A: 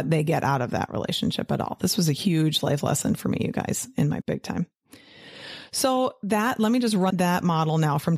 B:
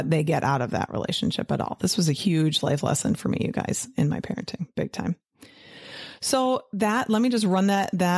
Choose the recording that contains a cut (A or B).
A